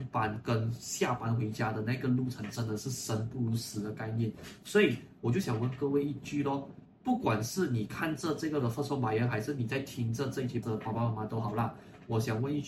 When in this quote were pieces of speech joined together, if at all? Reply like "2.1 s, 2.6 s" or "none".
6.8 s, 8.6 s, 10.6 s